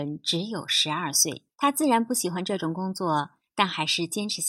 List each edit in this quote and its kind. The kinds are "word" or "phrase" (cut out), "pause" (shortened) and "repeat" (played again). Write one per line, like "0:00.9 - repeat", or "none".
0:01.5 - pause